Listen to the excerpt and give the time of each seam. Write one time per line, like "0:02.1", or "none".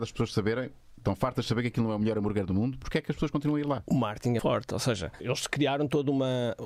0:04.4
0:05.2

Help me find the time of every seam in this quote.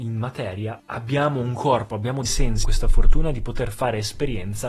0:02.3
0:02.6

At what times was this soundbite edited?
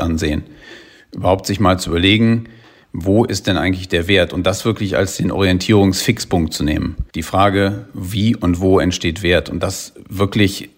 0:07.1

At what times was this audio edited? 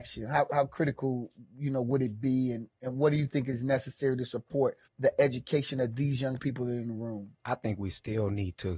0:04.9
0:07.4

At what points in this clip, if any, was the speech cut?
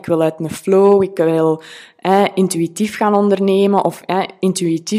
none

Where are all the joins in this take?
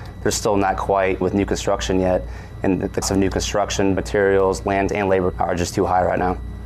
0:01.2
0:03.0
0:04.0
0:04.9
0:05.3

